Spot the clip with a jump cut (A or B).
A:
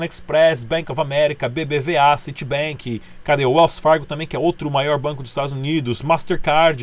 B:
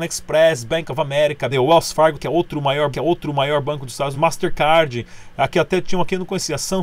B